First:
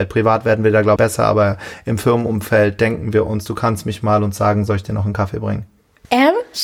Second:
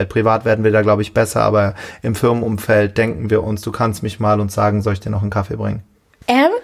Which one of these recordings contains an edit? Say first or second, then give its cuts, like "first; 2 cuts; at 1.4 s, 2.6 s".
first; 1 cut; at 1.0 s